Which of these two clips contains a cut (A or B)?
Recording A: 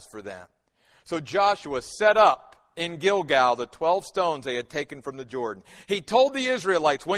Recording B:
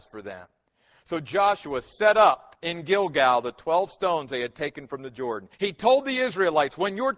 B